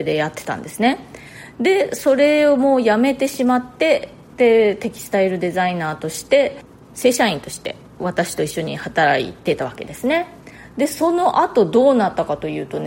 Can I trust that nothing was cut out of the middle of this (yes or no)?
yes